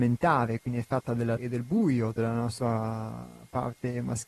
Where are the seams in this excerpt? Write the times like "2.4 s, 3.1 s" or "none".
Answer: 1.4 s